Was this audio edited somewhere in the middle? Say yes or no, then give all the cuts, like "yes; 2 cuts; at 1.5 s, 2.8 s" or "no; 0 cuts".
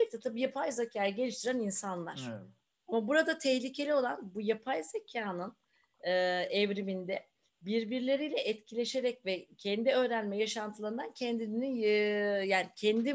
no; 0 cuts